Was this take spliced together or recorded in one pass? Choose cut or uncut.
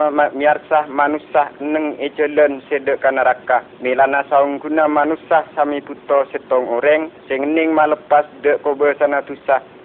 cut